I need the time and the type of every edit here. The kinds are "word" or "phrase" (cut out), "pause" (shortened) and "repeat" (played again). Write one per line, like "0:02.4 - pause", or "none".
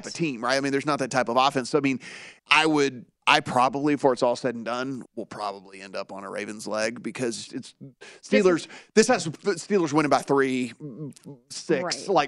0:02.4 - pause
0:03.2 - pause
0:05.1 - word
0:07.5 - word